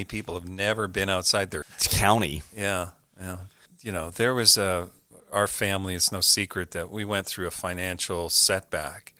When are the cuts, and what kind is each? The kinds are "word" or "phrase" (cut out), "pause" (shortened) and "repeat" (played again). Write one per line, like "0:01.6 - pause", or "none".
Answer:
0:01.6 - word